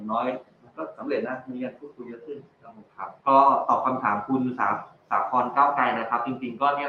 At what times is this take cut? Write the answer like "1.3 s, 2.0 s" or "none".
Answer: 2.9 s, 3.2 s